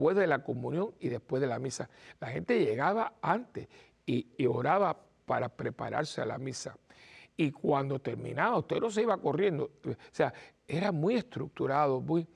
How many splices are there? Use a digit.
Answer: 1